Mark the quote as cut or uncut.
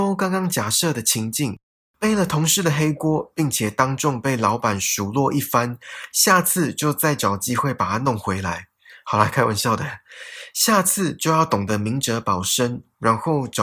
uncut